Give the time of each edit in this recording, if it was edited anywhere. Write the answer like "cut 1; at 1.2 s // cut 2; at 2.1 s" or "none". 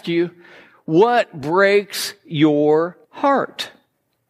cut 1; at 3.0 s